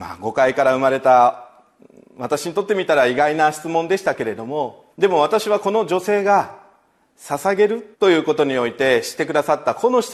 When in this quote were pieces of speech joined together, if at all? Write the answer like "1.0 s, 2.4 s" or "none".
4.9 s, 7.9 s

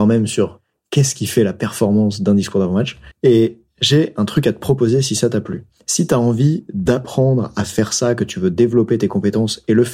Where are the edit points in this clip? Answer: 3.1 s

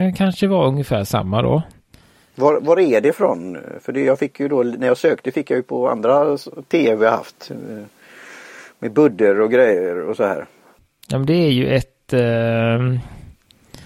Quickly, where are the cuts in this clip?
none

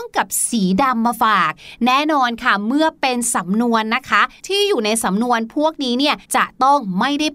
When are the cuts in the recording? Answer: 4.4 s, 6.2 s

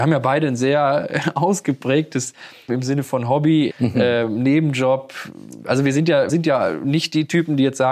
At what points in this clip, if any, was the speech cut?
2.7 s, 3.7 s, 6.3 s

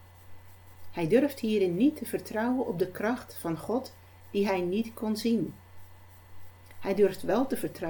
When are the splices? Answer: none

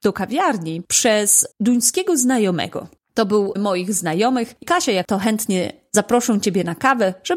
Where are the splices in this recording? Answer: 1.5 s, 3.0 s, 3.6 s, 4.6 s, 5.0 s

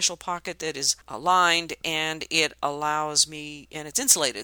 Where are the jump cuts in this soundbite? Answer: 1.0 s

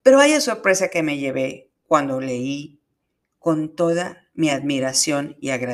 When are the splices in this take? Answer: none

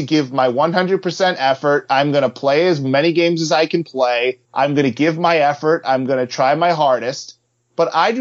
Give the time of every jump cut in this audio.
4.4 s

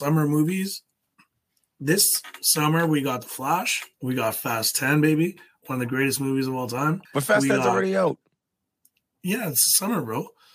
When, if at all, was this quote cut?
3.9 s, 7.0 s

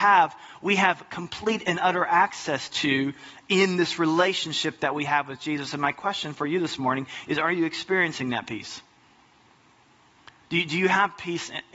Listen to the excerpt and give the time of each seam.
none

